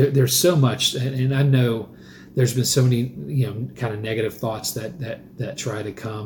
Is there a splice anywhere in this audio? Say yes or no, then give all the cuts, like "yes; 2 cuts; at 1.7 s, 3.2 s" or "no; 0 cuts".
no; 0 cuts